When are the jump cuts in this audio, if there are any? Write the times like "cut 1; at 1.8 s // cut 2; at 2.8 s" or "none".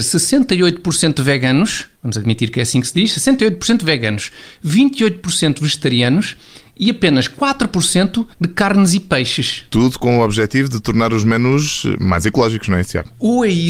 cut 1; at 1.9 s // cut 2; at 8.3 s // cut 3; at 9.7 s